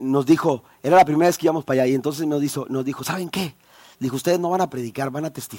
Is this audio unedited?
yes; 0 cuts

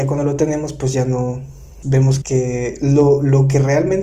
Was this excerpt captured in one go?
no; 2 cuts; at 1.8 s, 2.2 s

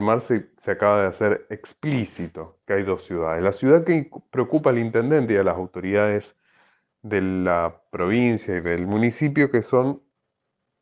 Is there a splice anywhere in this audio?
no; 0 cuts

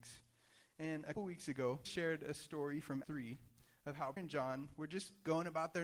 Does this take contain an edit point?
yes; 4 cuts; at 1.1 s, 1.8 s, 3.0 s, 4.2 s

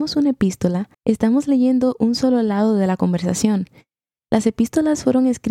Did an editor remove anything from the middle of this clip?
yes; 1 cut; at 0.9 s

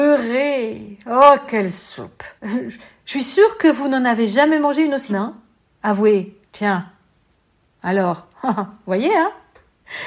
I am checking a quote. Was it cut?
yes; 3 cuts; at 2.4 s, 5.1 s, 6.5 s

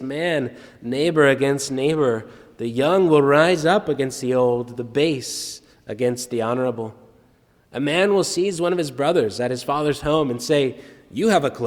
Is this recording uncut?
yes; 0 cuts

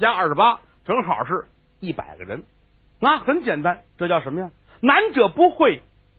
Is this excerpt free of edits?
no; 1 cut; at 3.9 s

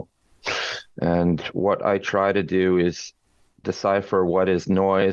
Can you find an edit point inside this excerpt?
no; 0 cuts

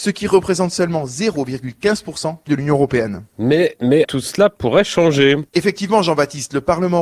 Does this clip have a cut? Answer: yes; 3 cuts; at 2.5 s, 4.0 s, 5.5 s

